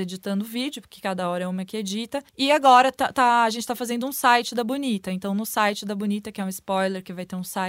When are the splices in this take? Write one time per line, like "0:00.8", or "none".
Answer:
0:02.3

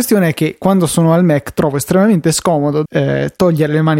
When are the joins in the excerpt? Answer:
0:02.9

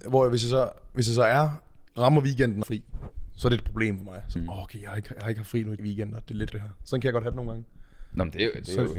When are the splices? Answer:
0:01.9
0:02.6
0:04.4
0:05.8
0:06.5

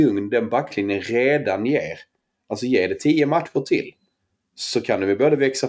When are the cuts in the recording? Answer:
none

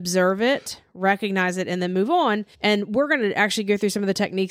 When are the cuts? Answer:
0:02.5

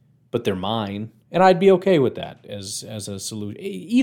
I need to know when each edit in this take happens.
0:01.2

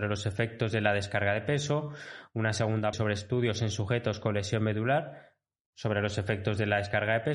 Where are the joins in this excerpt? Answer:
0:02.9

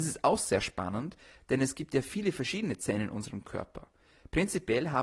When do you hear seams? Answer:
none

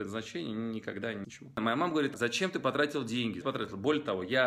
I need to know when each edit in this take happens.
0:01.2
0:03.4

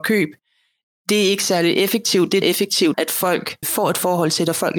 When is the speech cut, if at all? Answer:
0:02.4
0:02.9
0:03.6

